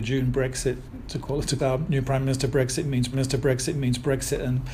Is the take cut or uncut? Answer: cut